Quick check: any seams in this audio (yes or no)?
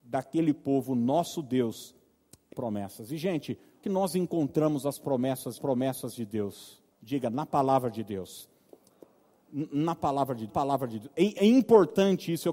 yes